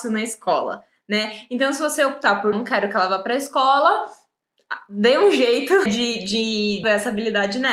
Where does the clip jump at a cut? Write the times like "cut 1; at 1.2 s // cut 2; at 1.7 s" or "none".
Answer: cut 1; at 2.5 s // cut 2; at 5.9 s // cut 3; at 6.8 s